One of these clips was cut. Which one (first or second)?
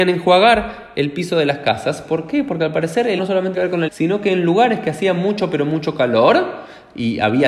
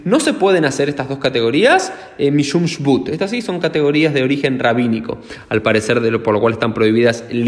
first